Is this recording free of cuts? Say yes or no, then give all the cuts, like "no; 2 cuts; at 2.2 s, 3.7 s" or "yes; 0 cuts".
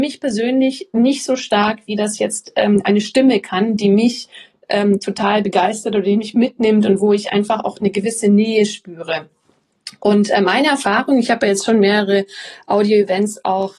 yes; 0 cuts